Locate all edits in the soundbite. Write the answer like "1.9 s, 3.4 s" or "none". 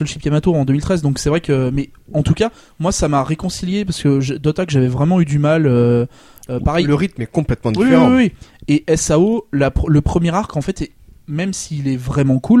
none